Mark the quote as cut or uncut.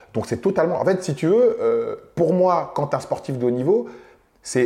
uncut